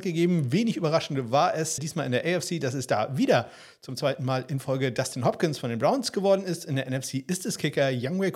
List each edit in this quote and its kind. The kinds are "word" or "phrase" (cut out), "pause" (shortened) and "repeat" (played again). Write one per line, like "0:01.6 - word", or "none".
0:01.8 - word